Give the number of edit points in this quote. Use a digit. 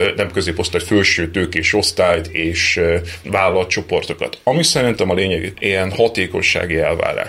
2